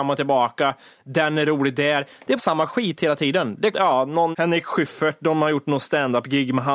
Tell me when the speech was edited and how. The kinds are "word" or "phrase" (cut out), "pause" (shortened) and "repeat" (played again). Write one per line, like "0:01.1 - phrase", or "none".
0:02.4 - phrase
0:03.7 - phrase
0:04.3 - word